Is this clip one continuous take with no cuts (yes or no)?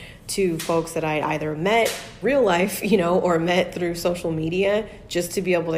no